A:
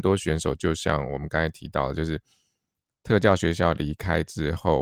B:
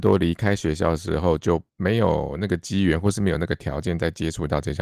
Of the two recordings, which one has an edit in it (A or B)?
B